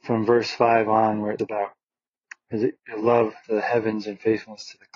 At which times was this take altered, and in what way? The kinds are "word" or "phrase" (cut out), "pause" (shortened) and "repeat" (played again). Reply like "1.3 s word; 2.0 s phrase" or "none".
1.4 s word; 2.8 s word; 3.4 s word